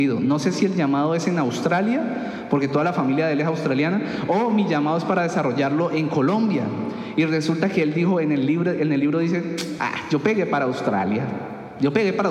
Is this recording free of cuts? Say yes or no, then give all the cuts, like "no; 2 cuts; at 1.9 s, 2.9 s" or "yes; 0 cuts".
yes; 0 cuts